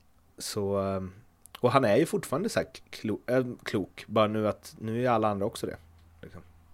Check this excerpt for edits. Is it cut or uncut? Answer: uncut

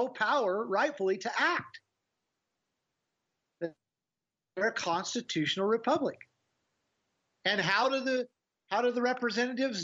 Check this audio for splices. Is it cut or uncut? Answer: uncut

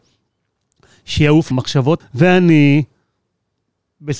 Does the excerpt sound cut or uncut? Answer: cut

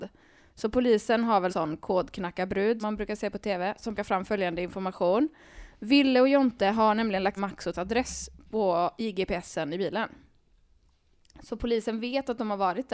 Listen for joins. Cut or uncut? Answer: cut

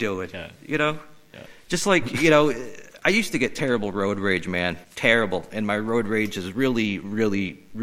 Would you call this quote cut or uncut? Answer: cut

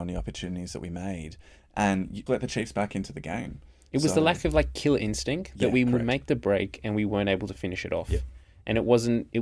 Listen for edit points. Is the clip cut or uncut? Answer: cut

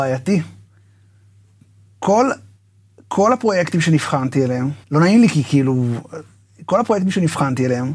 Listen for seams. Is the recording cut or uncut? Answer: cut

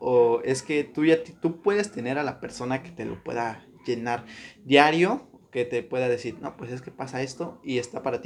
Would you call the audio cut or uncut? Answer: uncut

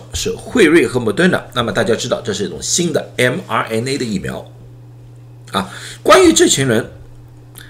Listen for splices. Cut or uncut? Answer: uncut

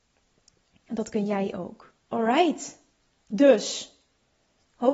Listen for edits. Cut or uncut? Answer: cut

